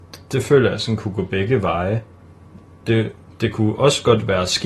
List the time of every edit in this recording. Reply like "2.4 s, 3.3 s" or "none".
none